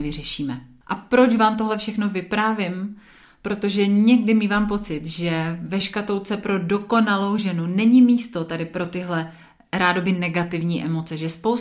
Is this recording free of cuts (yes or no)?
yes